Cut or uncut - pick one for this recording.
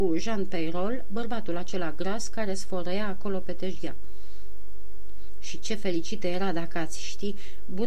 uncut